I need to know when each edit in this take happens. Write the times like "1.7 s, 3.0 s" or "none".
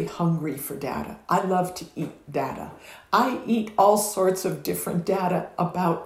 none

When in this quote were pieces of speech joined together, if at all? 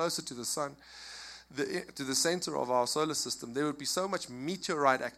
none

